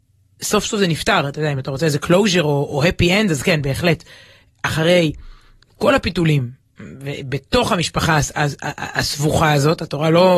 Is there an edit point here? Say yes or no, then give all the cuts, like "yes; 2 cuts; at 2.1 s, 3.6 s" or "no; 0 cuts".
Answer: no; 0 cuts